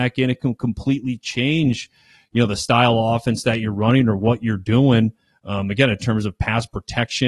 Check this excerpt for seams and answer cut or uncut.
uncut